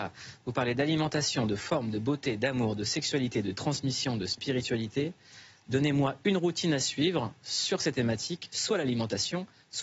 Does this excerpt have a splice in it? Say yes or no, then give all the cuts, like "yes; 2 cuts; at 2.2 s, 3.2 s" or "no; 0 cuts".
no; 0 cuts